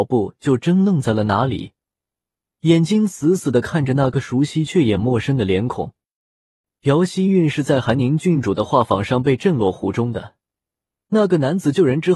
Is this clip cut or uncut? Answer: uncut